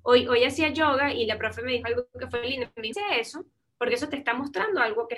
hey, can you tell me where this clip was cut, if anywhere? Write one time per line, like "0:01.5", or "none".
0:02.9